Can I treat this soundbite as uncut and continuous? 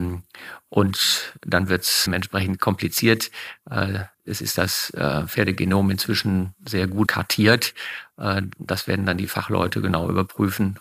no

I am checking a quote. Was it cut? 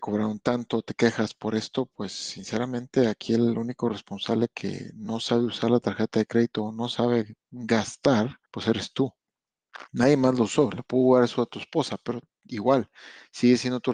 yes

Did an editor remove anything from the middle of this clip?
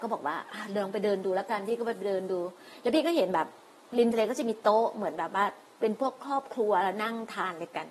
no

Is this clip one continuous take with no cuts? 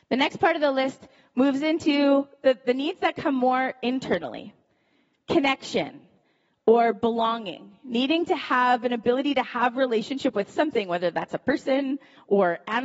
yes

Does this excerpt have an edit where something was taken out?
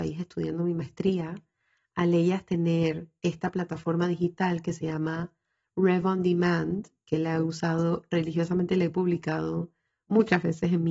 no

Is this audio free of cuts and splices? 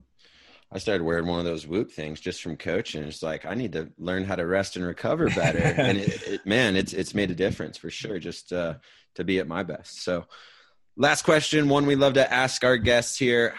yes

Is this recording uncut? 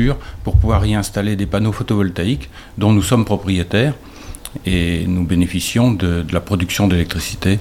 yes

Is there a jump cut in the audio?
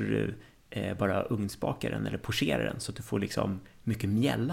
no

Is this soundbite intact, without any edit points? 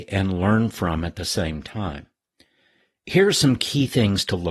yes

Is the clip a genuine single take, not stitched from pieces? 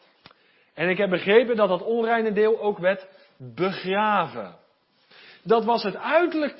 yes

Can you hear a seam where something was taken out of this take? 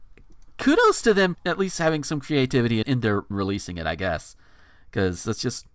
yes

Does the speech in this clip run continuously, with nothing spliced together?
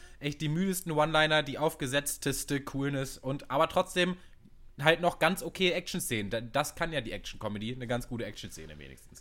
yes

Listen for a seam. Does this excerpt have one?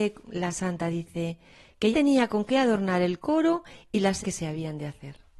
yes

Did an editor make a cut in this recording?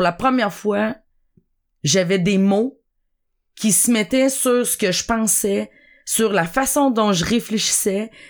no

